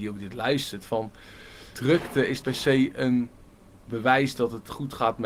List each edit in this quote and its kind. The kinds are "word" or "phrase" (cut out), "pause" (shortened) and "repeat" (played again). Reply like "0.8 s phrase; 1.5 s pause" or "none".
1.7 s word; 2.4 s word